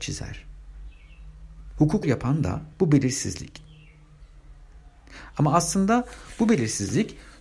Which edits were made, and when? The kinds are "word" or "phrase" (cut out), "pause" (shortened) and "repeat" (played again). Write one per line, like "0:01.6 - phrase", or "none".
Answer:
0:02.0 - word
0:02.7 - pause